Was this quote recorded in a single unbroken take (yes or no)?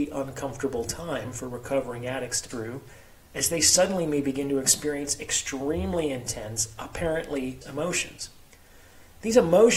no